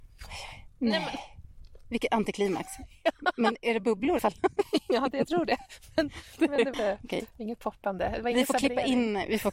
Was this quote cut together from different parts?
yes; 2 cuts; at 4.2 s, 6.7 s

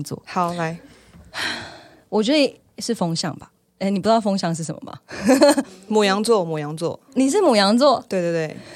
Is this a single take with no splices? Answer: no; 1 cut; at 7.1 s

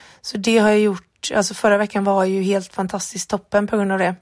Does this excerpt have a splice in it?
no; 0 cuts

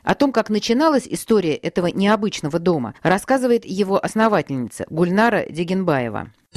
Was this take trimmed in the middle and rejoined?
yes; 1 cut; at 3.0 s

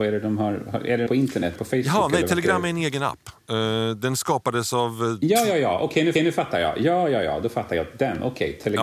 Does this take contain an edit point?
yes; 3 cuts; at 1.1 s, 1.6 s, 6.2 s

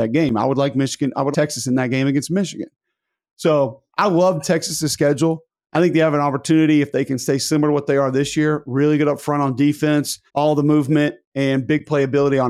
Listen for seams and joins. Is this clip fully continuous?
no; 3 cuts; at 1.3 s, 3.9 s, 10.3 s

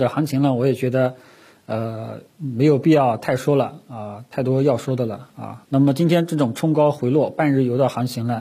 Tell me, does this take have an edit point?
no; 0 cuts

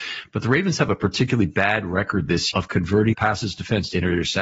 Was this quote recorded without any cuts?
no; 2 cuts; at 2.5 s, 3.1 s

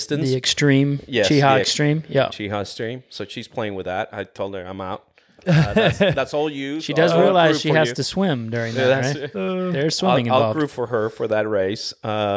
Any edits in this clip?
no; 0 cuts

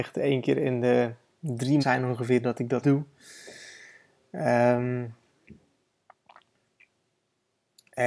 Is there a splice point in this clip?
yes; 2 cuts; at 1.8 s, 2.8 s

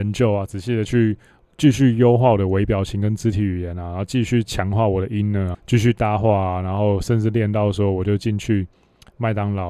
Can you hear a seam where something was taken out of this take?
yes; 1 cut; at 5.5 s

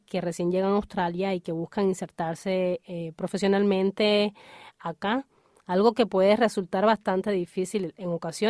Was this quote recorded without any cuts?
yes; 0 cuts

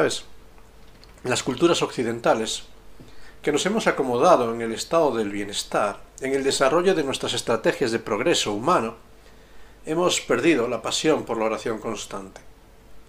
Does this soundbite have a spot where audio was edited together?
no; 0 cuts

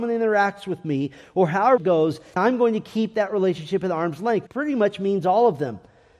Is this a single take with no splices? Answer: no; 3 cuts; at 1.8 s, 2.4 s, 4.5 s

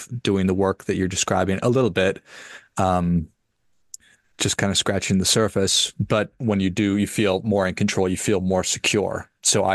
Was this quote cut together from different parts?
no; 0 cuts

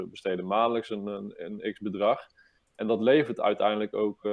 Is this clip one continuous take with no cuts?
yes; 0 cuts

